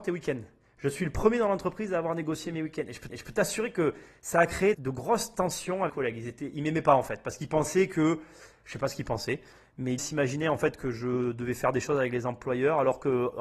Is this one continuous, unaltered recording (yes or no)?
no